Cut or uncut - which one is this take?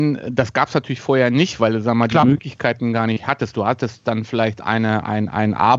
uncut